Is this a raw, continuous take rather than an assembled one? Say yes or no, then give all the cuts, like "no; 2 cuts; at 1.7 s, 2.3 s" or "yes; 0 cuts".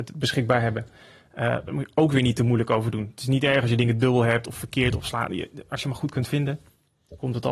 yes; 0 cuts